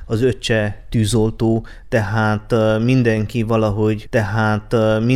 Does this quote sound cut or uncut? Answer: cut